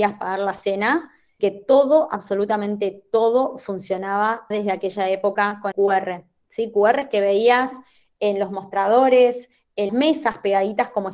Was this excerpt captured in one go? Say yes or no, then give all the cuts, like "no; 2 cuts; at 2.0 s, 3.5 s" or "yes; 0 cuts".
no; 4 cuts; at 1.4 s, 4.5 s, 5.7 s, 9.9 s